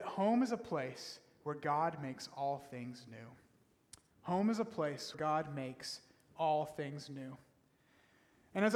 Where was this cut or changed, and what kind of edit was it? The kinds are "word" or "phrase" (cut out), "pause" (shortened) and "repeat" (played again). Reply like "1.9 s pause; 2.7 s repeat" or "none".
4.1 s pause; 5.1 s word